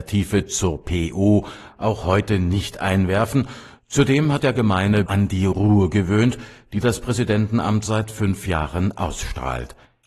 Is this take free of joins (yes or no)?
no